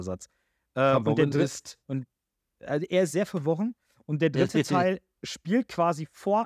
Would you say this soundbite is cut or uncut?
uncut